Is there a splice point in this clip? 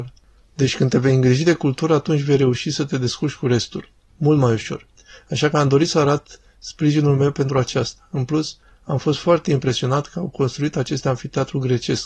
no; 0 cuts

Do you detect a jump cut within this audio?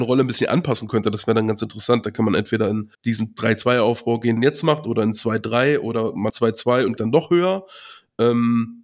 yes; 4 cuts; at 2.9 s, 4.4 s, 6.3 s, 7.0 s

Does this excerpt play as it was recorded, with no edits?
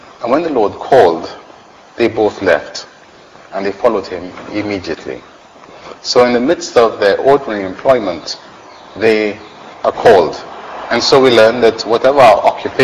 yes; 0 cuts

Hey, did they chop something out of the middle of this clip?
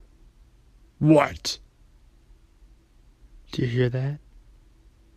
no; 0 cuts

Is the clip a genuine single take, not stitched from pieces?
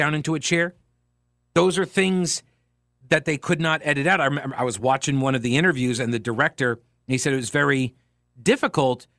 yes; 0 cuts

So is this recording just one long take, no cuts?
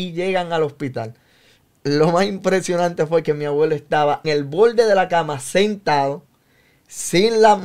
no; 1 cut; at 4.2 s

